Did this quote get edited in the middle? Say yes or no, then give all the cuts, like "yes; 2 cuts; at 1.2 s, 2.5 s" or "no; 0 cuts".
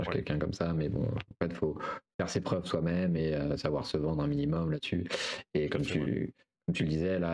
no; 0 cuts